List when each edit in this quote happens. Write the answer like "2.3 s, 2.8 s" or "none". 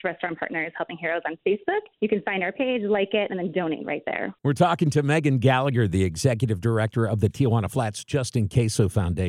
1.9 s, 4.4 s